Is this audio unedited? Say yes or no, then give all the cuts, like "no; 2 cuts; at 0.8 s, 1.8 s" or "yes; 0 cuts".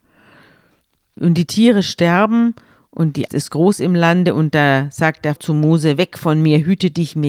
no; 2 cuts; at 3.3 s, 5.4 s